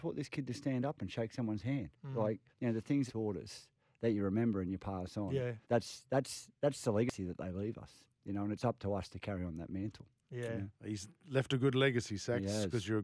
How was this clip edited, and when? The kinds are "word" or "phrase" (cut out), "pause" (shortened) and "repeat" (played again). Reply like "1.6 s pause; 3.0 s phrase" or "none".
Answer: 2.5 s pause; 3.1 s phrase; 5.6 s pause; 6.6 s pause